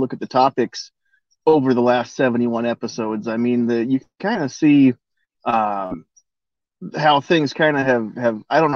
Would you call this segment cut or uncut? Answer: uncut